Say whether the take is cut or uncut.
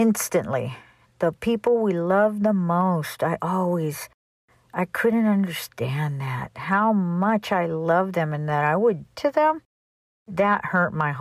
cut